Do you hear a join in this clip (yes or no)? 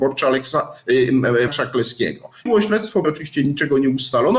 yes